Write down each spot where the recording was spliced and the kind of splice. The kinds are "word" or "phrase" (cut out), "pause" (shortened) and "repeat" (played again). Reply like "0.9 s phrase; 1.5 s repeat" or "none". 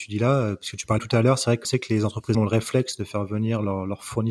1.0 s word; 1.6 s word; 2.3 s word